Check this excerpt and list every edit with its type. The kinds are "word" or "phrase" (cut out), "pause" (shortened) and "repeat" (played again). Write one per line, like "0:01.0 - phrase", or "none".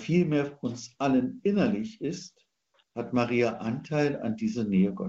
none